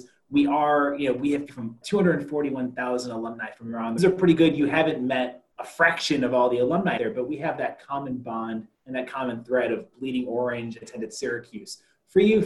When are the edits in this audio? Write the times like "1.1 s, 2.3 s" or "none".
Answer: 1.5 s, 1.8 s, 4.0 s, 5.5 s, 7.0 s, 8.7 s, 10.8 s